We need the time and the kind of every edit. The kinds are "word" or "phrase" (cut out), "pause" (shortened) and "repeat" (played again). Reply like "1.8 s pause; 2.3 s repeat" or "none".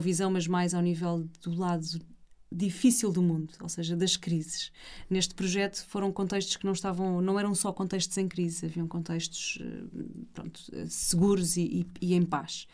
none